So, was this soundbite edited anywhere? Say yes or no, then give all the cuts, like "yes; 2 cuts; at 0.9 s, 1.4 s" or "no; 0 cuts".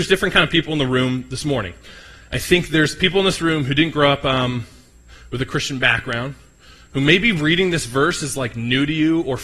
no; 0 cuts